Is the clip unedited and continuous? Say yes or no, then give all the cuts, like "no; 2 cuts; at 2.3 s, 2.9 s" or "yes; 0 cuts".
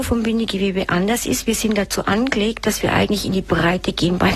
yes; 0 cuts